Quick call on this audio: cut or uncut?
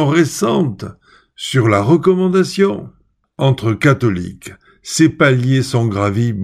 uncut